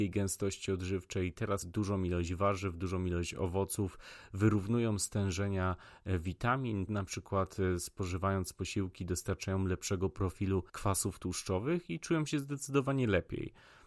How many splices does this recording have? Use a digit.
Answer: 3